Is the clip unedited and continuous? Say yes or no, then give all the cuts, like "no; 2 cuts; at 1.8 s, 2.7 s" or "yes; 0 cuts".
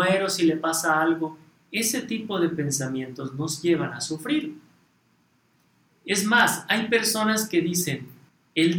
yes; 0 cuts